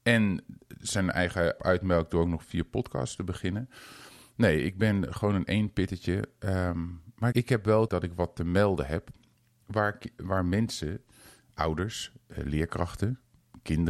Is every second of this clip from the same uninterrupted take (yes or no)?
no